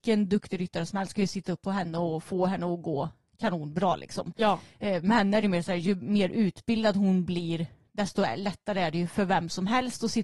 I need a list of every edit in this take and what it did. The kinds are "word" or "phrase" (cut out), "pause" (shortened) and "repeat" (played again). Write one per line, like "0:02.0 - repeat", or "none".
none